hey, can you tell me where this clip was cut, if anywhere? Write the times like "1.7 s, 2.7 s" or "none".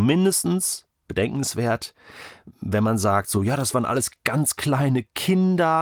none